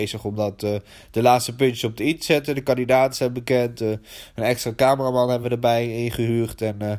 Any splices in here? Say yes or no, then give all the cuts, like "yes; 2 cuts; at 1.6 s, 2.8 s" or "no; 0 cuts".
no; 0 cuts